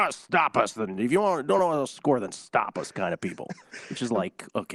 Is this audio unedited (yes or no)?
yes